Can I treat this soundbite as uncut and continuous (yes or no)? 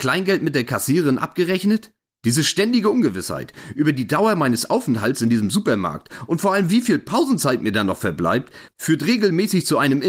no